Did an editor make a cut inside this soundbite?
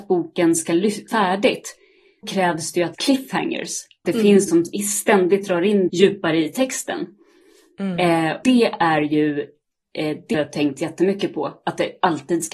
yes; 8 cuts; at 1.1 s, 2.2 s, 2.9 s, 4.0 s, 4.5 s, 5.9 s, 8.4 s, 10.3 s

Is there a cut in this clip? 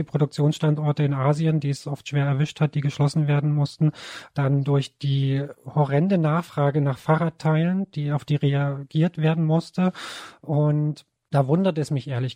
yes; 1 cut; at 11.1 s

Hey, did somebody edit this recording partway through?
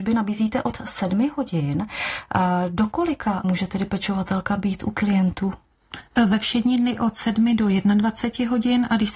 yes; 1 cut; at 3.4 s

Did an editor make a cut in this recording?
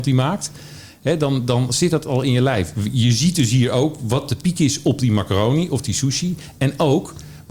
no; 0 cuts

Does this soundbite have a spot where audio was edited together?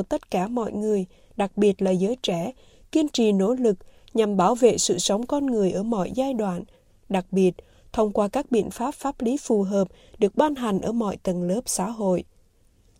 no; 0 cuts

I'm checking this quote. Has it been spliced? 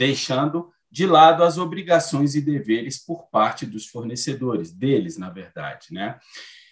no; 0 cuts

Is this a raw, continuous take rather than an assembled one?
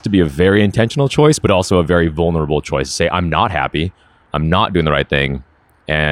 yes; 0 cuts

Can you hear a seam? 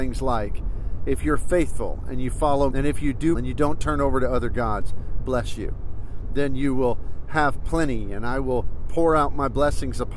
yes; 3 cuts; at 2.7 s, 3.4 s, 5.2 s

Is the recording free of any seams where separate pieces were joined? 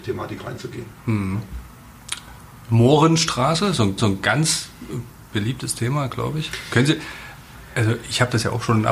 no; 1 cut; at 4.0 s

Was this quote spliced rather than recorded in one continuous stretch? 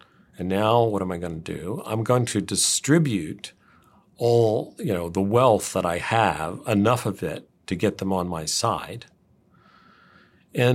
no; 0 cuts

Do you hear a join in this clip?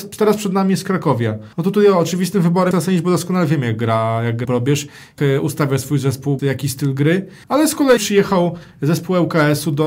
yes; 7 cuts; at 1.5 s, 2.7 s, 4.4 s, 5.2 s, 6.4 s, 7.4 s, 8.0 s

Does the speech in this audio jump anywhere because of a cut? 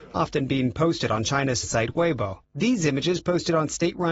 yes; 2 cuts; at 1.6 s, 2.4 s

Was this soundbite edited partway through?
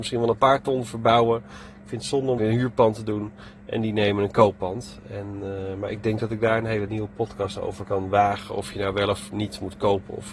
yes; 3 cuts; at 2.4 s, 6.9 s, 7.9 s

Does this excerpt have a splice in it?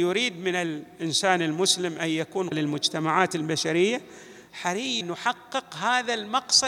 yes; 2 cuts; at 2.5 s, 5.0 s

